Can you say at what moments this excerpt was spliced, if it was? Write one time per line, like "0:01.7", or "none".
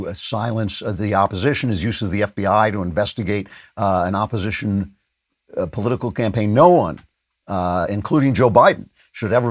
none